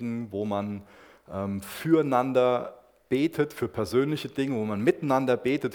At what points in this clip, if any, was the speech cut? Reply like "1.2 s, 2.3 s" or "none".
none